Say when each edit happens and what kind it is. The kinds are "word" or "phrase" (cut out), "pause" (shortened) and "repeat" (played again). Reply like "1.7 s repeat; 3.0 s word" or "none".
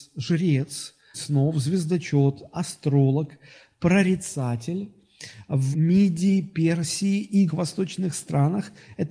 1.1 s word; 5.7 s word; 7.5 s word